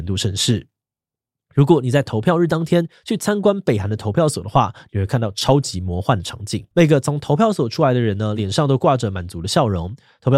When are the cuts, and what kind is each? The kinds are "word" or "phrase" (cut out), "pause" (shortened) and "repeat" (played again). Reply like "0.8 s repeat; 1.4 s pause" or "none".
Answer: 6.7 s pause